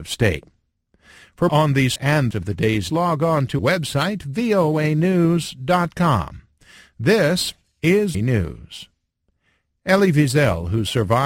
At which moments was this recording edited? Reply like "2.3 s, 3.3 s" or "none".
1.5 s, 2.0 s, 2.3 s, 2.9 s, 3.6 s, 8.1 s

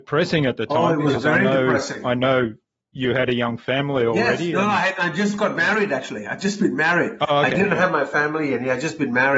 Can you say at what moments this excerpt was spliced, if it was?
none

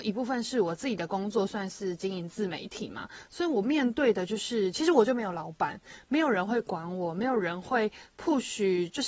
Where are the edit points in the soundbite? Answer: none

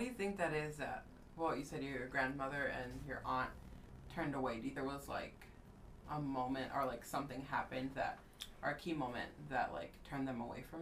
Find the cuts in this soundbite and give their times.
4.8 s

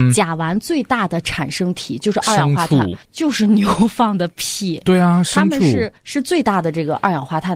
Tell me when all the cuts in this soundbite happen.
3.0 s, 6.0 s

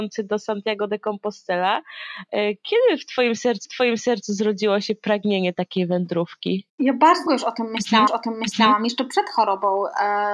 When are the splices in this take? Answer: 3.6 s, 6.7 s, 7.3 s, 8.1 s

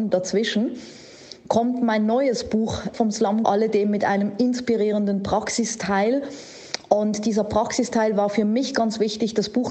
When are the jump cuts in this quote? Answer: 2.9 s, 3.4 s

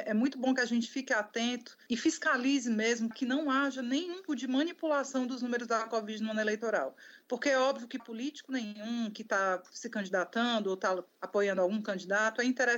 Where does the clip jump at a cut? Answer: 3.1 s, 4.3 s, 8.0 s

